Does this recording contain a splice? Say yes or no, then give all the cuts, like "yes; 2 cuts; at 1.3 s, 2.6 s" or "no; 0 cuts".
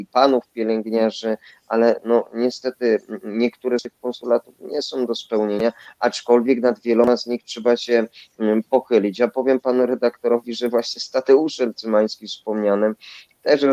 no; 0 cuts